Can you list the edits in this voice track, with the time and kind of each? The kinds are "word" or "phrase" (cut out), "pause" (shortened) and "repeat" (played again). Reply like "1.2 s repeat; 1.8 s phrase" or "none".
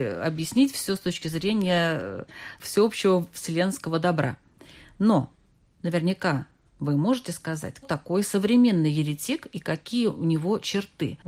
7.8 s word